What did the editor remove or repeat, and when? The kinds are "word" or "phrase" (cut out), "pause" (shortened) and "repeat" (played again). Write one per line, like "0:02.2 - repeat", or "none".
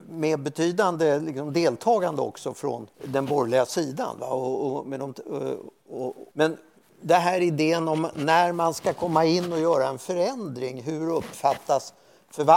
0:02.9 - pause
0:06.3 - pause